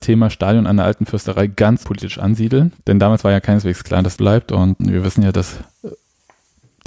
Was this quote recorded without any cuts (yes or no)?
no